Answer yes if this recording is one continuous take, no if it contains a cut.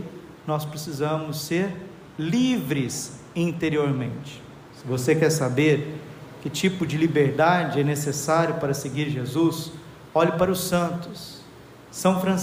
yes